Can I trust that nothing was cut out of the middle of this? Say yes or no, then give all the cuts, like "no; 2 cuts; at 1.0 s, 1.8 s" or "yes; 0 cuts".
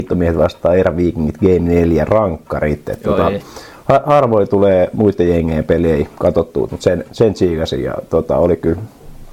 no; 1 cut; at 6.7 s